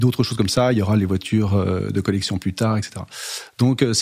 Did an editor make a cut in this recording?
no; 0 cuts

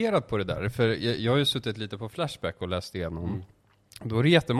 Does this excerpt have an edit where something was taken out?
no; 0 cuts

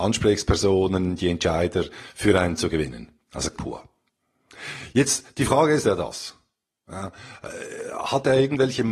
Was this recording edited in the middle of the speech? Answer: yes; 3 cuts; at 2.6 s, 3.5 s, 5.8 s

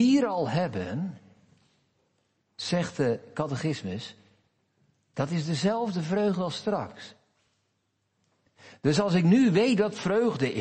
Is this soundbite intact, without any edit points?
yes; 0 cuts

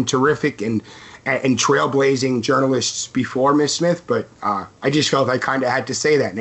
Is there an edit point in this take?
yes; 1 cut; at 4.3 s

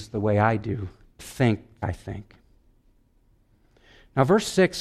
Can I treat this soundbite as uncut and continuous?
no; 2 cuts; at 1.2 s, 1.8 s

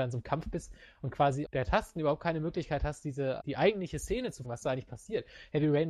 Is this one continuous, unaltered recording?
no; 3 cuts; at 1.4 s, 3.4 s, 4.4 s

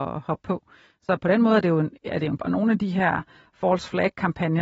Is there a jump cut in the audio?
yes; 1 cut; at 2.4 s

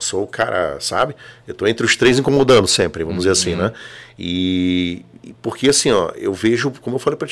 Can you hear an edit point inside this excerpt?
no; 0 cuts

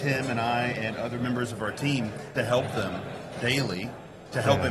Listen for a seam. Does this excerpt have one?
yes; 1 cut; at 2.4 s

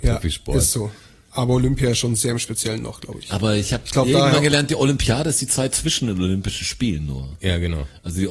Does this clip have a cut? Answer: no; 0 cuts

